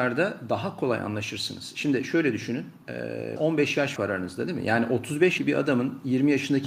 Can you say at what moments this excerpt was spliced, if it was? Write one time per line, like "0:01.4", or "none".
0:03.4
0:04.0
0:05.4